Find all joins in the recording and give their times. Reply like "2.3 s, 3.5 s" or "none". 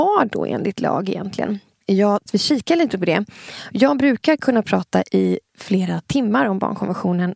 2.3 s